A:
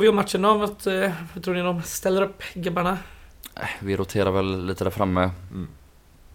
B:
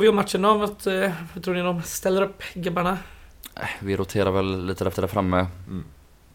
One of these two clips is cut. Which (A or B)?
B